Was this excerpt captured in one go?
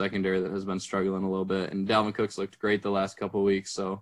yes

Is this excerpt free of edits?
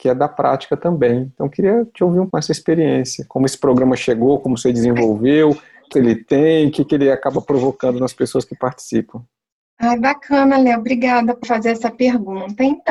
no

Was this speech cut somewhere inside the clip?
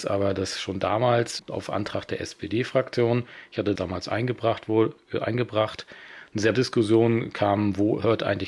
yes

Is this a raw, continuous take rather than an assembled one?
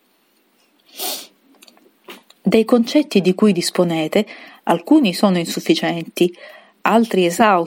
yes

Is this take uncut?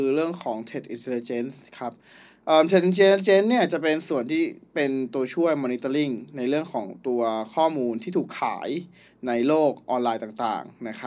yes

